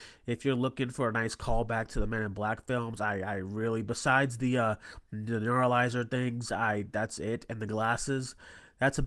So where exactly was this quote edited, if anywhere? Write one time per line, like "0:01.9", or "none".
none